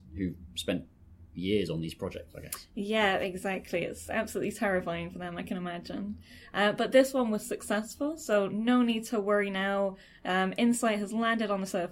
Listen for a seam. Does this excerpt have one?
no; 0 cuts

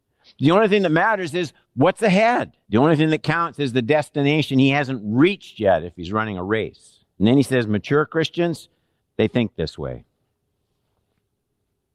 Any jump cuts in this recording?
yes; 4 cuts; at 1.6 s, 2.6 s, 7.1 s, 9.0 s

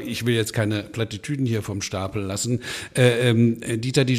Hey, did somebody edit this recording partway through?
no; 0 cuts

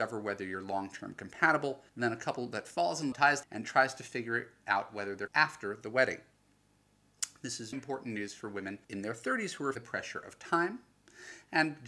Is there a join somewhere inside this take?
yes; 7 cuts; at 1.9 s, 3.1 s, 3.4 s, 5.3 s, 7.7 s, 8.8 s, 9.8 s

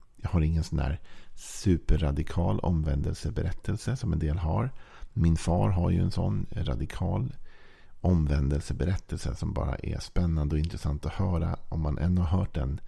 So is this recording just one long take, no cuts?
yes; 0 cuts

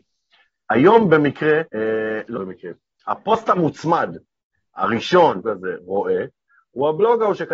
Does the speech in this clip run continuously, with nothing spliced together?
no; 3 cuts; at 1.7 s, 2.4 s, 5.4 s

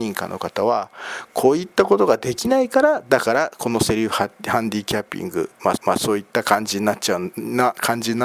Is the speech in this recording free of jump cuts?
no; 1 cut; at 5.8 s

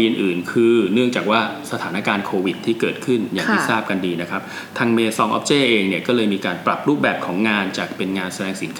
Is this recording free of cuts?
yes; 0 cuts

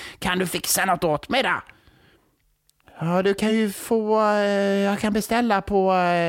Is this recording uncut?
yes; 0 cuts

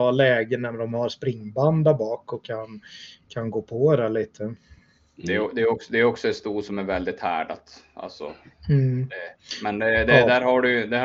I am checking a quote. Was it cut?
no; 0 cuts

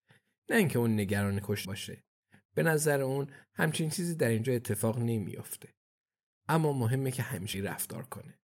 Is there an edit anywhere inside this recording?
yes; 2 cuts; at 1.6 s, 7.5 s

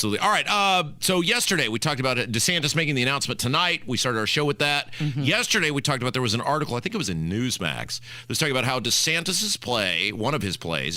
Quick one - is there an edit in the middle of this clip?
no; 0 cuts

